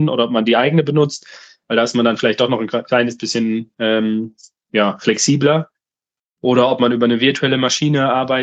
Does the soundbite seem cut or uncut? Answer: uncut